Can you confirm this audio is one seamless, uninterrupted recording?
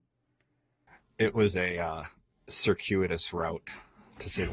yes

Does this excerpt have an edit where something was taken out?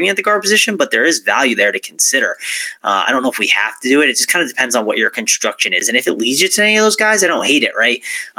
no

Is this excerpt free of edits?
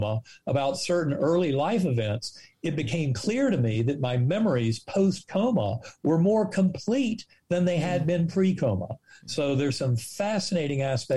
yes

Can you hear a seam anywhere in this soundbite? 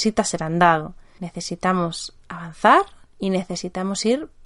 no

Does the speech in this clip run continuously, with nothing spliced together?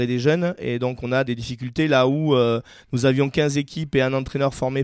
yes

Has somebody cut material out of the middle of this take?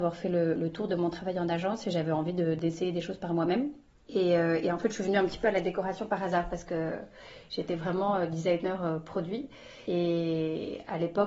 no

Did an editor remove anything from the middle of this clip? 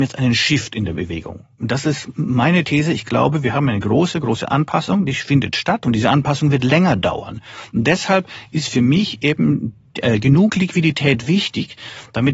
no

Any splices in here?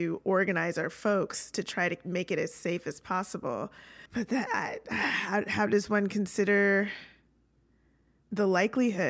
yes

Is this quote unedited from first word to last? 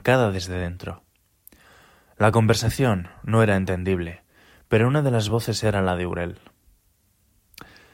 yes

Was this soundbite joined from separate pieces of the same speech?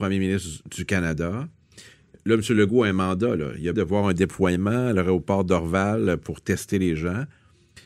yes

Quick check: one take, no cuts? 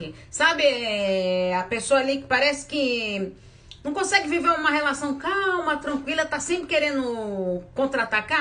yes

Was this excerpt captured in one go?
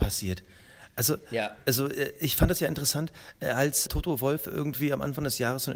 no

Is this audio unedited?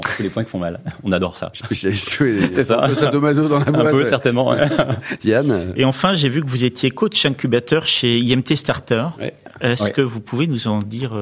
yes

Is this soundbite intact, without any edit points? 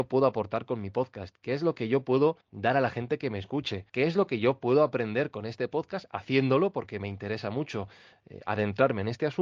no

